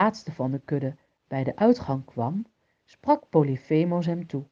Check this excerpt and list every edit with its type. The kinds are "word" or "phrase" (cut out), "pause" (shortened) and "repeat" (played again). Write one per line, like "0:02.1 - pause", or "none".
none